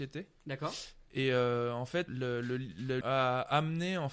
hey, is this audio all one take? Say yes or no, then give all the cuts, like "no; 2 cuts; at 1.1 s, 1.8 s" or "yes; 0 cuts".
no; 2 cuts; at 2.1 s, 3.0 s